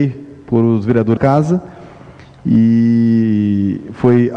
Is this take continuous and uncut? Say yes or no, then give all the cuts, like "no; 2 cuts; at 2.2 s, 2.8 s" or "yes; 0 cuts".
no; 1 cut; at 1.2 s